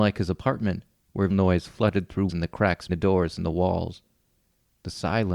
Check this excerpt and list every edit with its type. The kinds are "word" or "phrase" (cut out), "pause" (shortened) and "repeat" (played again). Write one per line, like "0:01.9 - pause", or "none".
0:01.3 - word
0:02.3 - word
0:02.9 - word